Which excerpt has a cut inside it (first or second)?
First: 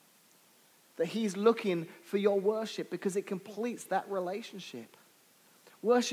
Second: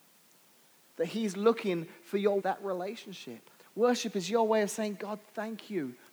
second